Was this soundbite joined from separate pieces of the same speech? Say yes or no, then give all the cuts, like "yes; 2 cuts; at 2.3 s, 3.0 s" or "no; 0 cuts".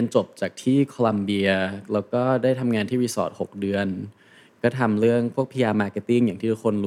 no; 0 cuts